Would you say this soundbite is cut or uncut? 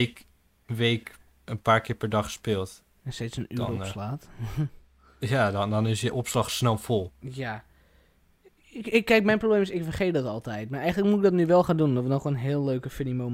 uncut